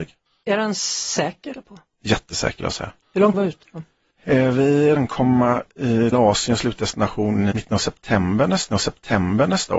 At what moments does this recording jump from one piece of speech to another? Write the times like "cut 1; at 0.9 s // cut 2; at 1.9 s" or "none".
cut 1; at 1.5 s // cut 2; at 2.6 s // cut 3; at 3.0 s // cut 4; at 3.3 s // cut 5; at 5.0 s // cut 6; at 6.1 s // cut 7; at 7.5 s // cut 8; at 8.7 s